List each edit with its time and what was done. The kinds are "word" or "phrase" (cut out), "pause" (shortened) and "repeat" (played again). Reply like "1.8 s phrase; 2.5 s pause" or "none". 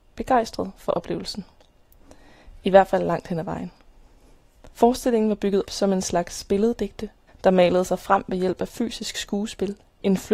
4.7 s pause; 5.7 s word; 7.3 s pause